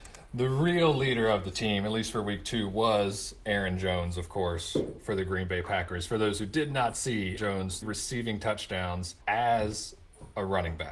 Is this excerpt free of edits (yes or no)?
no